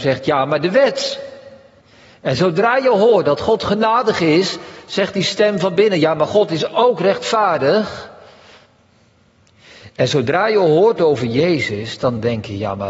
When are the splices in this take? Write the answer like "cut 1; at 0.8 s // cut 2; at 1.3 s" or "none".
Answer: cut 1; at 1.8 s